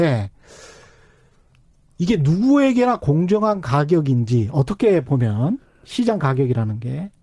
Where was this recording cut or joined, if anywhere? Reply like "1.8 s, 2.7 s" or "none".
none